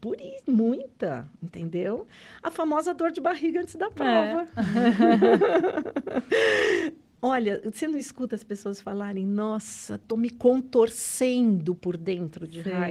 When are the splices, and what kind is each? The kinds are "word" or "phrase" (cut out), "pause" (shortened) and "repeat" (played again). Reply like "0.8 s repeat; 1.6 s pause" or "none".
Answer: none

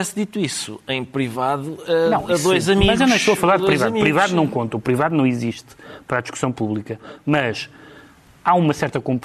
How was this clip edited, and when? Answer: none

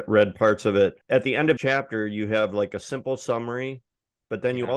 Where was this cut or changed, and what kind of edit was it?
1.0 s pause; 1.6 s word

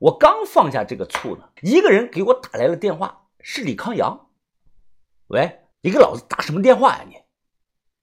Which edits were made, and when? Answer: 1.6 s pause; 5.7 s pause

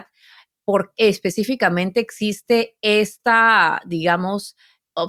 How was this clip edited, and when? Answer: 0.9 s word

